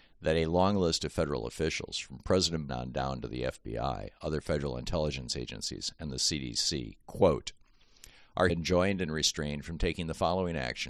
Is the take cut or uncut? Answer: cut